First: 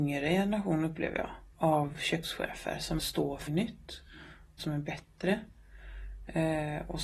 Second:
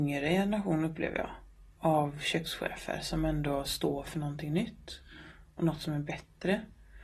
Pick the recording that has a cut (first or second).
first